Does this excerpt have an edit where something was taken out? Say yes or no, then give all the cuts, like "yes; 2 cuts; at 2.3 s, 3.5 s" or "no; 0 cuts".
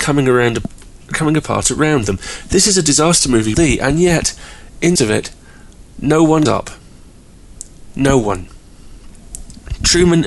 yes; 3 cuts; at 3.5 s, 5.0 s, 6.5 s